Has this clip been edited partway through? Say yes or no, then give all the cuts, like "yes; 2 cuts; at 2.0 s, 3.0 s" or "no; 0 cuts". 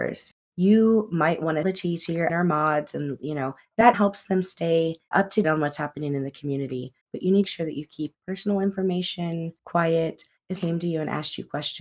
yes; 8 cuts; at 1.6 s, 2.3 s, 3.9 s, 5.1 s, 5.4 s, 7.4 s, 8.1 s, 10.6 s